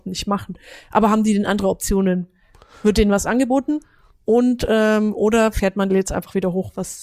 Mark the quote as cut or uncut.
cut